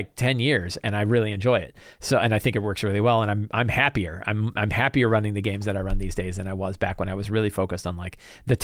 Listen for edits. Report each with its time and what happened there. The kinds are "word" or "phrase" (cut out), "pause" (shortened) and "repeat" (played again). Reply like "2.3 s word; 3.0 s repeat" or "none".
none